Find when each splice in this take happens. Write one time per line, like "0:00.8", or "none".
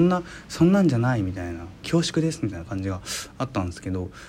0:01.8